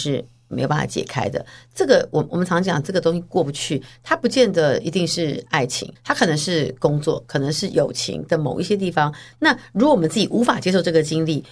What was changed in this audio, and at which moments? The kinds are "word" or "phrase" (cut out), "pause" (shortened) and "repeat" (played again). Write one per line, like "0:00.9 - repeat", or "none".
0:06.0 - pause